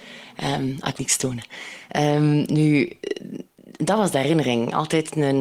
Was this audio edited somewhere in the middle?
yes; 1 cut; at 1.0 s

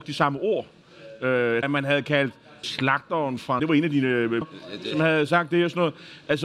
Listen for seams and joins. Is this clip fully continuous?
no; 4 cuts; at 1.6 s, 2.6 s, 3.6 s, 4.4 s

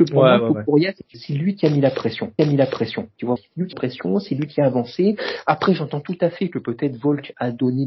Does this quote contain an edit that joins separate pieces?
yes; 4 cuts; at 1.1 s, 2.4 s, 3.4 s, 3.7 s

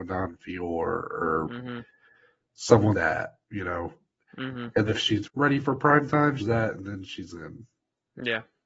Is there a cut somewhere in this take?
yes; 4 cuts; at 2.9 s, 4.9 s, 5.2 s, 6.4 s

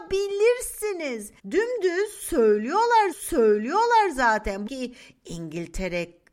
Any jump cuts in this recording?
yes; 3 cuts; at 1.4 s, 3.1 s, 4.7 s

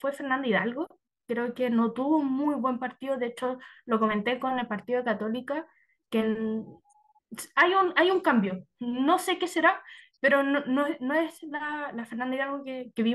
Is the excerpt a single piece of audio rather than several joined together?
yes; 0 cuts

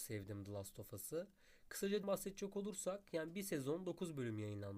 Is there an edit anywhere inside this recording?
yes; 1 cut; at 2.0 s

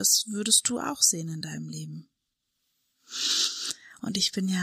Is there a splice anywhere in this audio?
no; 0 cuts

